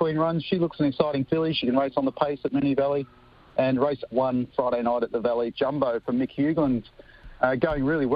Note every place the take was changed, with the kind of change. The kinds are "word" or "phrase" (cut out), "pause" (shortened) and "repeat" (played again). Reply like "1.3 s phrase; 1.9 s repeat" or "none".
4.1 s phrase; 5.5 s word

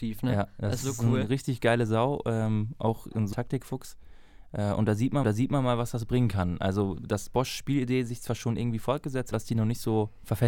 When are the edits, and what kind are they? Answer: 3.3 s phrase; 5.2 s repeat; 9.3 s phrase

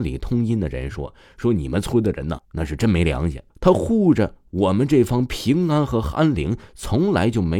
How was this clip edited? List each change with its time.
2.4 s word; 3.5 s pause

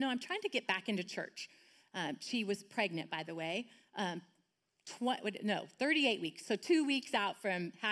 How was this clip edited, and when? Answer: none

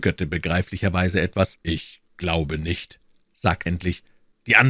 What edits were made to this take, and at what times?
1.6 s pause; 3.7 s word

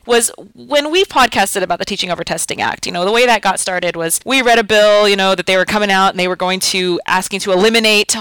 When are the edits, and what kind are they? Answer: none

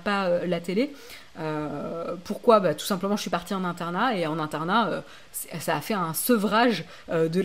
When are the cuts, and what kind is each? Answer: none

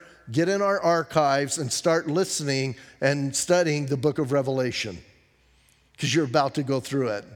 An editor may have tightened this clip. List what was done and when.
none

